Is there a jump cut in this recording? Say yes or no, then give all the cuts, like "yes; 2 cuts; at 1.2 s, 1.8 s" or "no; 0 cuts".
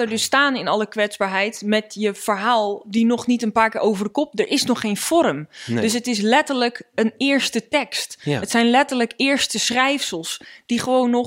no; 0 cuts